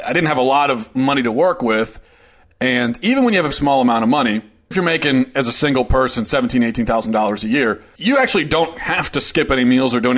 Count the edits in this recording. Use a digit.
3